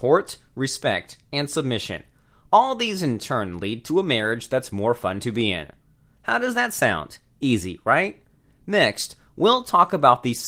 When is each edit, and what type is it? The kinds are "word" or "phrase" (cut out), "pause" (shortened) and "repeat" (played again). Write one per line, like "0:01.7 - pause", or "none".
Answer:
none